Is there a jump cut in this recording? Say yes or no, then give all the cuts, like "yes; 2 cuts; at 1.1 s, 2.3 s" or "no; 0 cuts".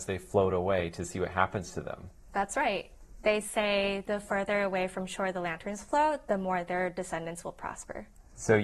no; 0 cuts